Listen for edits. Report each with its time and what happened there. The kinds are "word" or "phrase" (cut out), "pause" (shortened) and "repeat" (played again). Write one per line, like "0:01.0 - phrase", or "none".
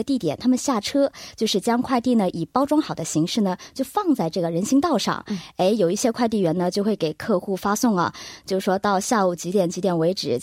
none